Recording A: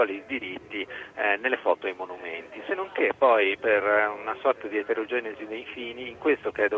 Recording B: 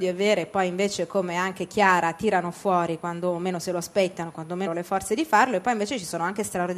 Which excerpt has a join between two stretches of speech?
B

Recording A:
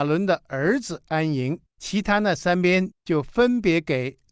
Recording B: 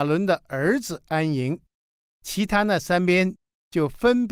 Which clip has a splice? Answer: A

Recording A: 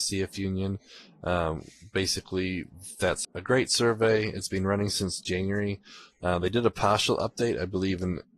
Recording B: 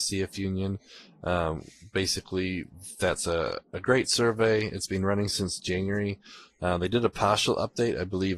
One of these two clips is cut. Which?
A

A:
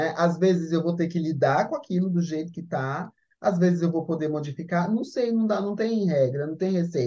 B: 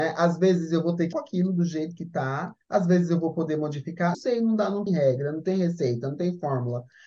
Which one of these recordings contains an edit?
B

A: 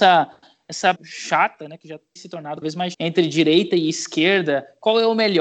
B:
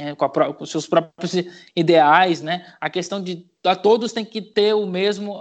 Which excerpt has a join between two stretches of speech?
A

